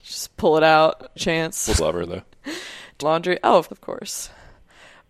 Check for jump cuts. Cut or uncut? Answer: cut